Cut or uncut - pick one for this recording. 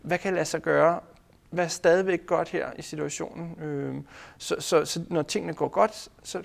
uncut